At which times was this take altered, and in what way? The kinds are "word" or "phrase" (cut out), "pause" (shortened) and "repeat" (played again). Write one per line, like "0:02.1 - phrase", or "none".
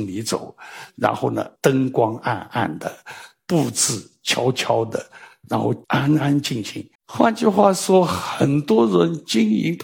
0:01.6 - pause
0:05.8 - pause
0:06.9 - pause